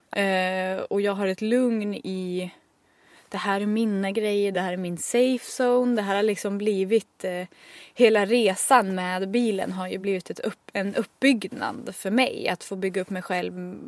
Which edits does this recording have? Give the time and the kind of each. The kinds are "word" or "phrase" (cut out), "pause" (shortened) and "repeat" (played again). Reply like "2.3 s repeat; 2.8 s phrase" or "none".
none